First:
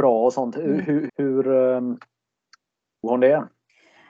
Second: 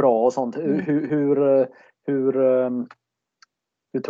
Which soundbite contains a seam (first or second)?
first